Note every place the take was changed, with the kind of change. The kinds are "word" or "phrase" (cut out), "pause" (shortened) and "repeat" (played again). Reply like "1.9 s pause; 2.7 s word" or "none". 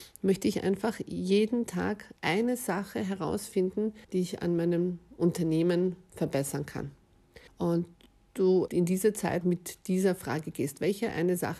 2.2 s pause; 4.0 s pause; 7.5 s pause; 8.7 s word; 9.4 s word

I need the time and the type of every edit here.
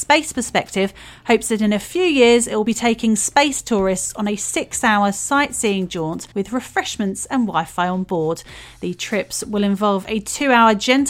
6.3 s pause

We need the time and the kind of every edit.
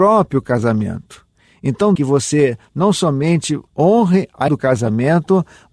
2.0 s phrase; 3.7 s pause; 4.5 s word

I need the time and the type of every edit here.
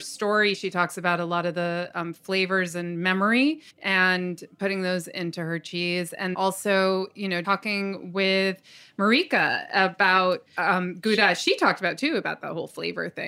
3.7 s pause; 6.3 s word; 7.4 s word; 10.5 s pause

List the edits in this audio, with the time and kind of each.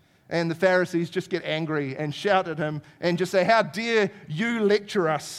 none

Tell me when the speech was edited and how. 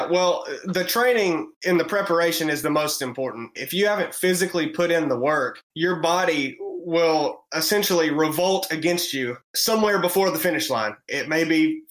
1.6 s pause; 5.6 s pause; 7.5 s pause; 9.5 s pause

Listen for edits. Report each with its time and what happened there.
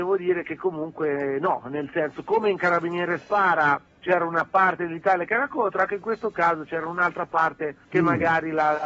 3.9 s pause; 7.8 s pause

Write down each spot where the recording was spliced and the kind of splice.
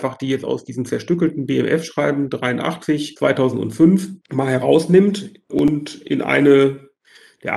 4.2 s pause

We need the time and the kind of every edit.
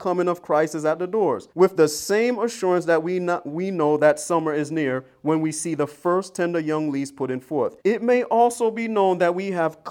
1.5 s pause; 7.8 s pause

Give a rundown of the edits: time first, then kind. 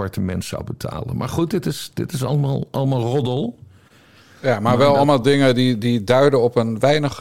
none

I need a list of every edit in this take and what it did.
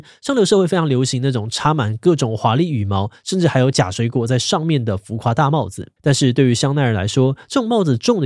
6.0 s pause

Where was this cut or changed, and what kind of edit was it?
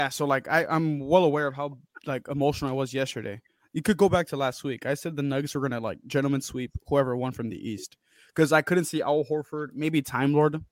none

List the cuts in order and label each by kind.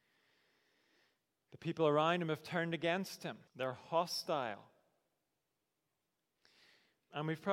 3.5 s pause

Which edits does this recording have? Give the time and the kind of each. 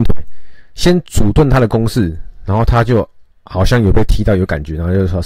3.3 s pause

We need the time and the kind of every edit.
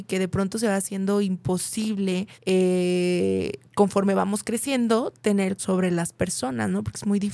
2.3 s pause; 5.6 s phrase

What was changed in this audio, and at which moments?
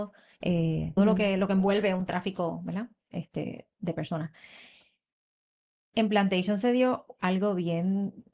1.0 s phrase

